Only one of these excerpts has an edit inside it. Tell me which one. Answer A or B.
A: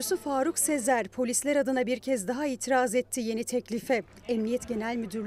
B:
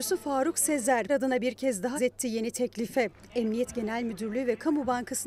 B